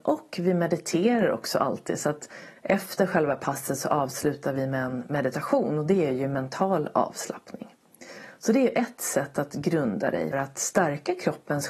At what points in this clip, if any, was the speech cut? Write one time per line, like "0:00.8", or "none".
0:10.3